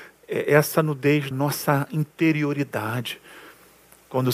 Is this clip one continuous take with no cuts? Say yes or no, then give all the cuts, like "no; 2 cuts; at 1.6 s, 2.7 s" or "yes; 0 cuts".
no; 1 cut; at 1.3 s